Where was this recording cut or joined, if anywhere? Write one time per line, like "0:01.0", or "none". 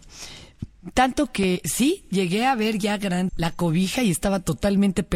0:01.6
0:03.3